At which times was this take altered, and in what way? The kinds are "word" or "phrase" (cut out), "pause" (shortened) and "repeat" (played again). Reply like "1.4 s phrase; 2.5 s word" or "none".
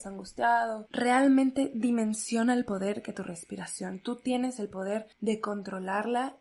3.1 s word; 5.1 s pause